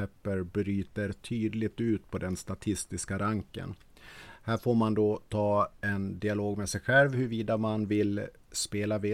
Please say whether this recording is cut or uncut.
uncut